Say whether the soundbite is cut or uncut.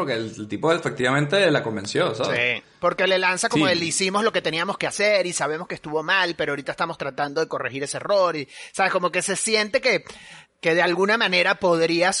uncut